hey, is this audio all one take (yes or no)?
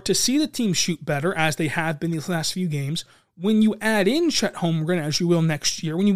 yes